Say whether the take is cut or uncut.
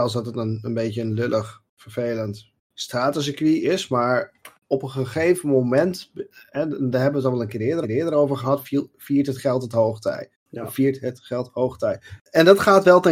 cut